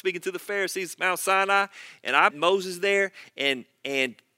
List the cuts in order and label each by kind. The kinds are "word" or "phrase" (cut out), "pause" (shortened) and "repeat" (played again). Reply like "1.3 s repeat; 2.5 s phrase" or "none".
2.3 s word